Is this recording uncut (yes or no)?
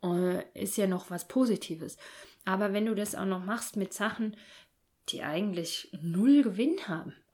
yes